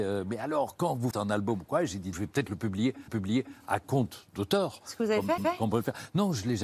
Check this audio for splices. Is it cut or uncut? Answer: cut